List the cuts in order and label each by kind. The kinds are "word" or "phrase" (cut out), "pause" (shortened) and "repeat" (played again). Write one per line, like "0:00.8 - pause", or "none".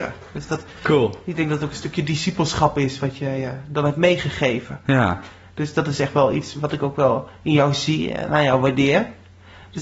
none